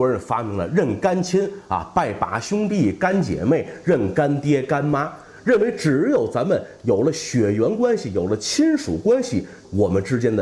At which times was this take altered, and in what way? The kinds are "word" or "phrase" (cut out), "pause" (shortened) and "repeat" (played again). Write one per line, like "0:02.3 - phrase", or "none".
none